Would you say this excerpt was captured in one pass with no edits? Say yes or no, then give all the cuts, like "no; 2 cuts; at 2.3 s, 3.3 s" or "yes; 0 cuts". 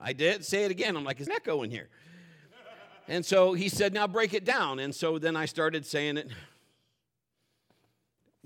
no; 1 cut; at 1.3 s